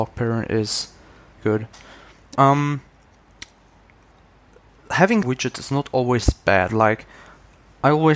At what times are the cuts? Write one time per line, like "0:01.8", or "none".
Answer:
0:01.4
0:02.3
0:05.2